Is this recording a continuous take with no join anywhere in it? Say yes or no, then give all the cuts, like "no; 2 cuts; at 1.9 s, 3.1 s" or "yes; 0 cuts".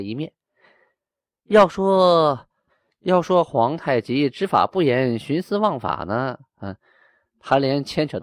yes; 0 cuts